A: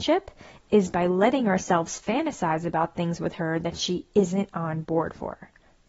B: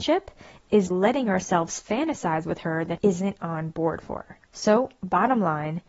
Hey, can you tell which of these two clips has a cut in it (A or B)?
B